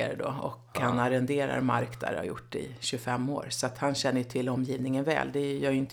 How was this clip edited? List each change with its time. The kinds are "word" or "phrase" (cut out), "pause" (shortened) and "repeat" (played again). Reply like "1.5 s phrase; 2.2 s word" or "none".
none